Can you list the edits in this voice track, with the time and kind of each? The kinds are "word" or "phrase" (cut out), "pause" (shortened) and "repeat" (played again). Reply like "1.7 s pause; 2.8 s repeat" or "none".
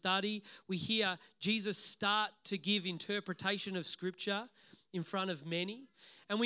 none

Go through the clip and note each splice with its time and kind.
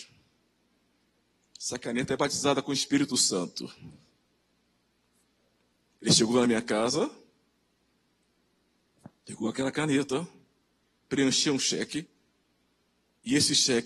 none

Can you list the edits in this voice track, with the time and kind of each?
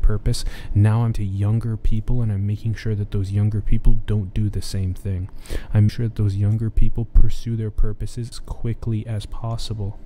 1.1 s word; 5.9 s word; 8.3 s word

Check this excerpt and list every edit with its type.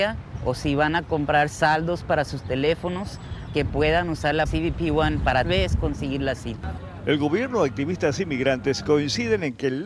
3.5 s word; 4.5 s word; 5.4 s word

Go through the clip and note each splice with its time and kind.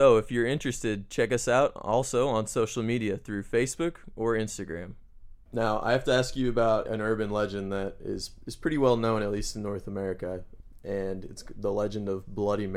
none

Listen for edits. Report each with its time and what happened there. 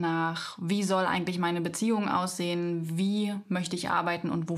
none

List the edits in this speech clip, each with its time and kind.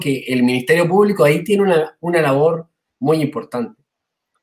none

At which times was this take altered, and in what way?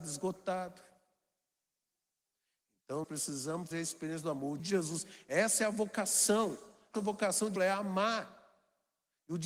3.0 s word; 3.7 s word; 4.6 s word; 6.9 s word; 7.6 s word

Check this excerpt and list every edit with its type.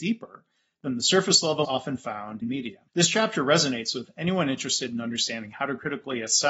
1.6 s word; 2.4 s word; 2.9 s pause

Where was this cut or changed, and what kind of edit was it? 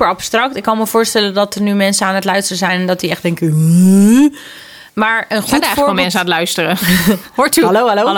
4.9 s pause

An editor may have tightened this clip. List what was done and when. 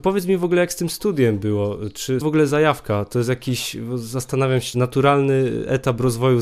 2.2 s word; 4.7 s phrase

